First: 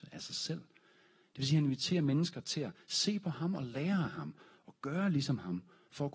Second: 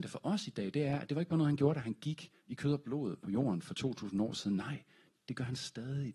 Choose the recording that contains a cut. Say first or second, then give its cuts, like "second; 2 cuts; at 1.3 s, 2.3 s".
second; 1 cut; at 2.4 s